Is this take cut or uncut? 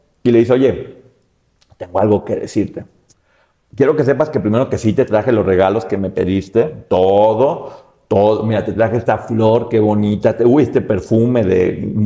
uncut